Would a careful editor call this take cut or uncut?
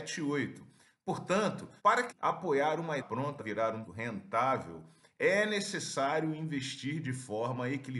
cut